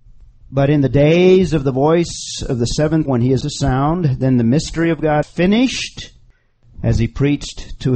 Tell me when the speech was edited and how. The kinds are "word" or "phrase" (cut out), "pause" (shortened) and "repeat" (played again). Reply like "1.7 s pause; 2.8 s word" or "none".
3.1 s word; 3.4 s word; 5.2 s word